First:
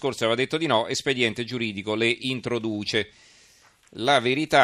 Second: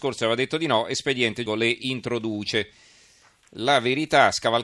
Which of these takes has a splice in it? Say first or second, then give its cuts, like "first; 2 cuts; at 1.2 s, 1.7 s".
second; 1 cut; at 1.5 s